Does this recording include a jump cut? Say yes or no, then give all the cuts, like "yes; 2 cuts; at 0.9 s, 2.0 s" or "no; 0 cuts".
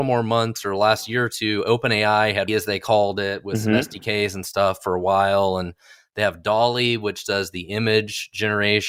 yes; 1 cut; at 2.5 s